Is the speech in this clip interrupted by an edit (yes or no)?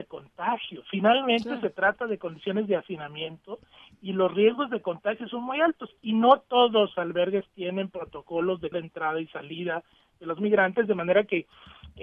yes